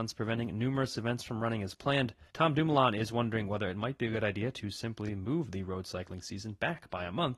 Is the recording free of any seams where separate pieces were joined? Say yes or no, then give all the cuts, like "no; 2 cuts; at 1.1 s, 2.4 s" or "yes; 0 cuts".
no; 1 cut; at 2.3 s